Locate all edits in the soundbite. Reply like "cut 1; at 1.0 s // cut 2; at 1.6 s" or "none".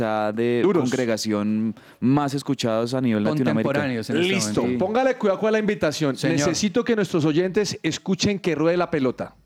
none